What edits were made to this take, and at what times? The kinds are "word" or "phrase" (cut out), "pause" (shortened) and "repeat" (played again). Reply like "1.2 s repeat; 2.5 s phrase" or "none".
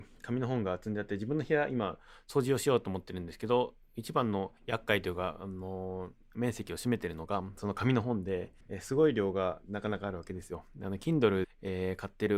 4.6 s pause; 8.6 s pause; 11.4 s word